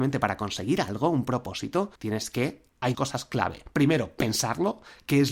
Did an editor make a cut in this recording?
yes; 2 cuts; at 2.0 s, 2.9 s

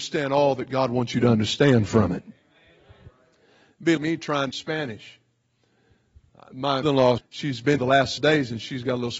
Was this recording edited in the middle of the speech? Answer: yes; 6 cuts; at 4.0 s, 4.5 s, 6.8 s, 7.2 s, 7.8 s, 8.2 s

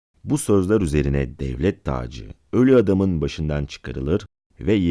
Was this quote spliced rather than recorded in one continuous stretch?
no; 0 cuts

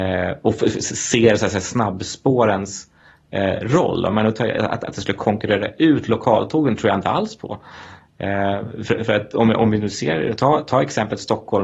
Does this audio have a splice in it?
no; 0 cuts

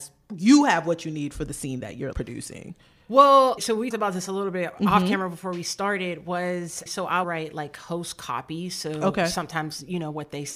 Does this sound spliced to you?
yes; 5 cuts; at 2.1 s, 3.6 s, 3.9 s, 6.9 s, 7.2 s

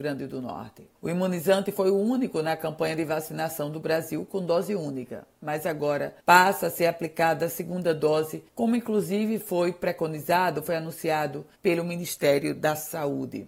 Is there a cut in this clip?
yes; 4 cuts; at 0.9 s, 6.2 s, 8.5 s, 11.5 s

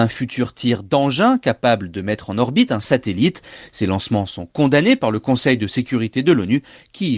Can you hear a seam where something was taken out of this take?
no; 0 cuts

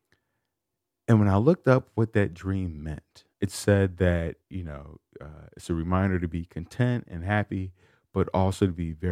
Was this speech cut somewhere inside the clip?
yes; 2 cuts; at 3.3 s, 4.4 s

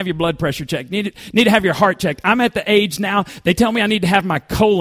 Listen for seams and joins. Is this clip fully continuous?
yes; 0 cuts

